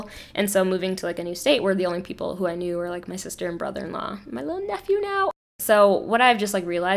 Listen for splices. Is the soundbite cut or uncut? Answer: uncut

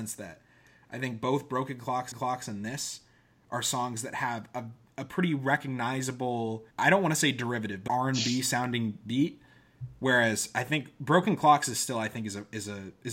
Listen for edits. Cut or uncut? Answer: cut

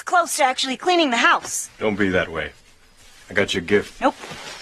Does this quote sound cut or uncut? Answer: uncut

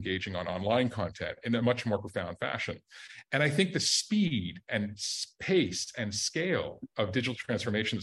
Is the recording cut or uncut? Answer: uncut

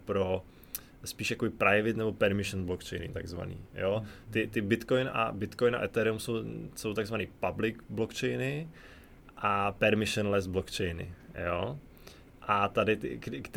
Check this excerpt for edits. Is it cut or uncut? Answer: uncut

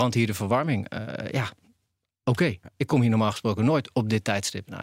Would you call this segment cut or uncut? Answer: uncut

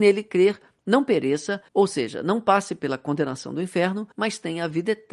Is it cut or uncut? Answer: cut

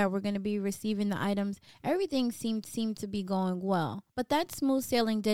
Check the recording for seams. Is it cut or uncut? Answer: cut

